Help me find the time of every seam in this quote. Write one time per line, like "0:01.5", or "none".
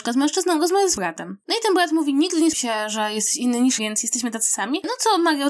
0:01.0
0:02.5
0:03.8